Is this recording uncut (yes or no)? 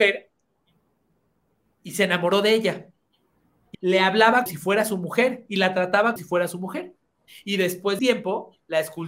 no